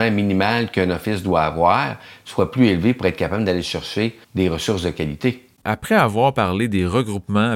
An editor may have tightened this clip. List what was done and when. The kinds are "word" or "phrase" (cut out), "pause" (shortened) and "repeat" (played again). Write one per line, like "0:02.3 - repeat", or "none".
0:04.2 - pause

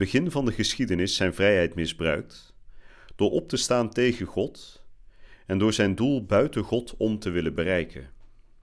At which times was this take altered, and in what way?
none

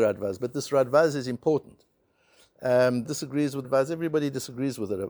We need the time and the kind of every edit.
0:03.0 - word
0:03.6 - word

